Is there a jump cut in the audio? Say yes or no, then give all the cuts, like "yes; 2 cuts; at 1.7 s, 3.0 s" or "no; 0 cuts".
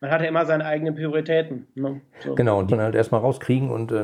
yes; 1 cut; at 2.7 s